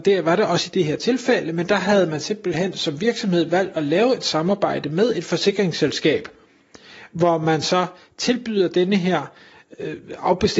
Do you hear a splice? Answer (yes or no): no